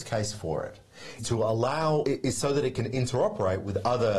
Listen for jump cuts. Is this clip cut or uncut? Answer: cut